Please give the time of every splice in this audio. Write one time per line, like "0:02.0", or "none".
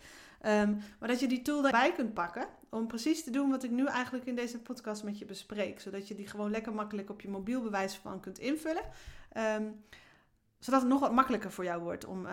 0:01.7